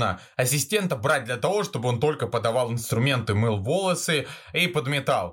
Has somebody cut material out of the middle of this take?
no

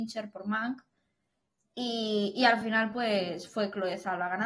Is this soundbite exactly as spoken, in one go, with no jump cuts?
yes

